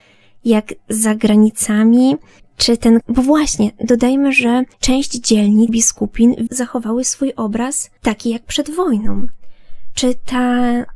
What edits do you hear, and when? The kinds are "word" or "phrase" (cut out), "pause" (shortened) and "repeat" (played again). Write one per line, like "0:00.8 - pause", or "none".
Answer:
0:02.4 - pause
0:03.0 - word
0:04.7 - pause
0:05.7 - phrase
0:06.5 - word
0:08.0 - pause